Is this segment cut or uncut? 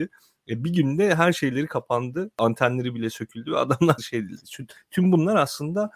cut